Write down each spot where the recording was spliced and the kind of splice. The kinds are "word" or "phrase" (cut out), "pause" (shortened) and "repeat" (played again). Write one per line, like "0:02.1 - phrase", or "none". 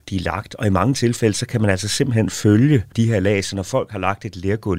none